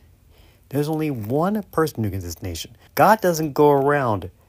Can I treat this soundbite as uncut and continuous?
no; 2 cuts; at 2.2 s, 2.9 s

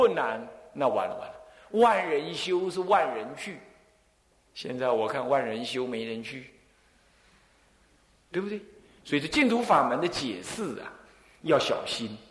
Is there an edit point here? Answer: no; 0 cuts

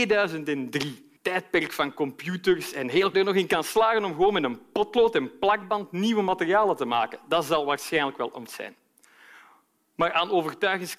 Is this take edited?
yes; 3 cuts; at 1.2 s, 3.1 s, 8.5 s

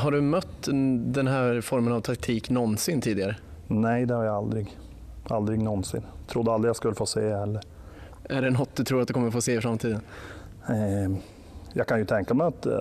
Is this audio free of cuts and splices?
yes; 0 cuts

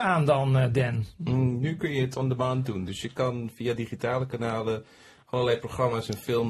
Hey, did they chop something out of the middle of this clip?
no; 0 cuts

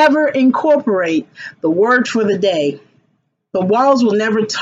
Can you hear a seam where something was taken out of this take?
no; 0 cuts

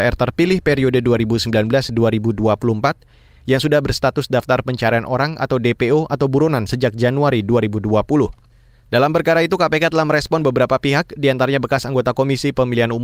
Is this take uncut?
yes; 0 cuts

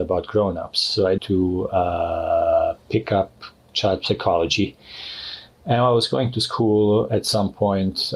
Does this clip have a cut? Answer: yes; 1 cut; at 1.2 s

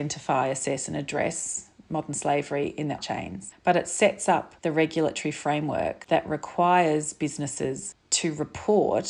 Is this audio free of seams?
no; 2 cuts; at 3.0 s, 4.6 s

